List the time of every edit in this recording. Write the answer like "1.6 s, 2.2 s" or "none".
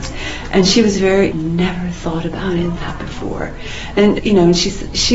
1.3 s, 2.8 s